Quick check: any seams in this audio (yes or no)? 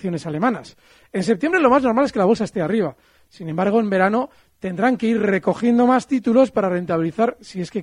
no